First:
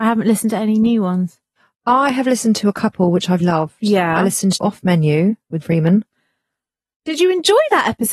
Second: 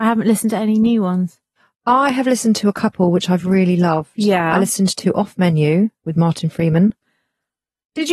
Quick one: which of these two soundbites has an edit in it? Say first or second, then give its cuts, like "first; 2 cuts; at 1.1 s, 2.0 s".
first; 3 cuts; at 3.4 s, 4.6 s, 5.6 s